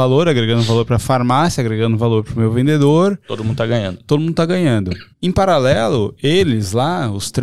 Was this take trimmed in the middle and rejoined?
yes; 1 cut; at 5.1 s

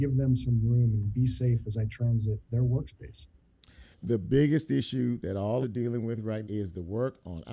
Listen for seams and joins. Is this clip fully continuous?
no; 4 cuts; at 2.4 s, 3.9 s, 5.6 s, 6.4 s

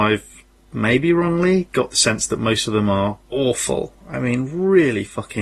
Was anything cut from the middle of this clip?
yes; 1 cut; at 3.2 s

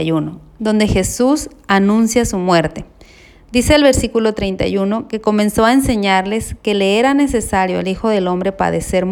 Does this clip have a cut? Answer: no; 0 cuts

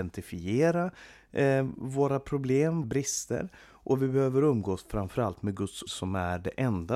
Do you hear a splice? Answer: yes; 2 cuts; at 2.8 s, 5.9 s

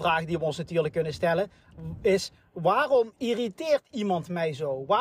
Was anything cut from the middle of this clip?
no; 0 cuts

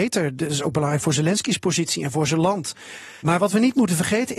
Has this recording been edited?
yes; 1 cut; at 3.2 s

